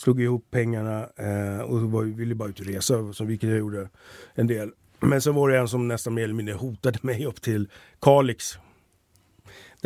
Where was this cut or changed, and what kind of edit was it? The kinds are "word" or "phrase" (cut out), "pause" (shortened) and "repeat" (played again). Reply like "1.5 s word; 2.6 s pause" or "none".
none